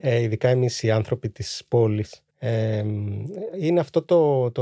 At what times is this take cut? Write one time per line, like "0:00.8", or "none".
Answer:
0:02.3